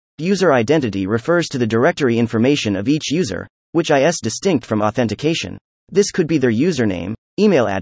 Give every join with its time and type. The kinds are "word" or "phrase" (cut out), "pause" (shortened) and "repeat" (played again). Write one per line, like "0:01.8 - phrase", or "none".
0:05.7 - pause